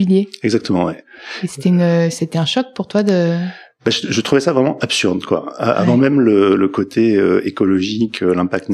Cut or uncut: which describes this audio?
uncut